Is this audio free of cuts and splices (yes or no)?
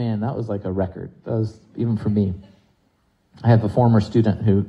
yes